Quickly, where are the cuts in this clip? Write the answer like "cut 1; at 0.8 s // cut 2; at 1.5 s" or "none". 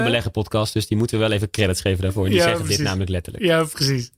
none